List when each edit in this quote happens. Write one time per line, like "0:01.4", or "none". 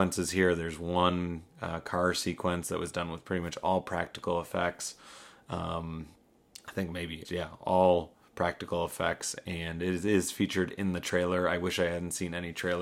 0:07.2